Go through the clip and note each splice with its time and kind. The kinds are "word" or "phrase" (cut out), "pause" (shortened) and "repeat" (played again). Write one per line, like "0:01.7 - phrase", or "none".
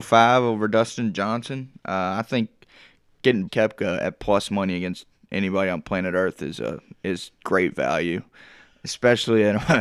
0:03.5 - word

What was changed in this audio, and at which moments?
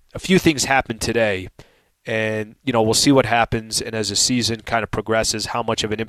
none

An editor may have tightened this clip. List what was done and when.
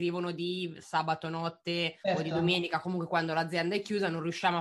0:02.0 - pause

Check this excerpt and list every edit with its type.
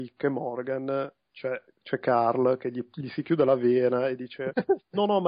0:01.2 - pause

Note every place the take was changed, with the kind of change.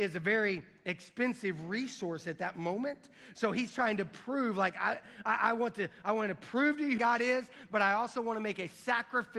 0:07.0 - phrase

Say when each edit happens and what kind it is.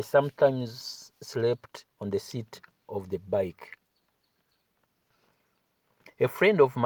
none

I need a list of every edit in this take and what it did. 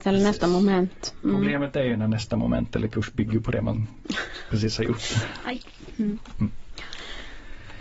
none

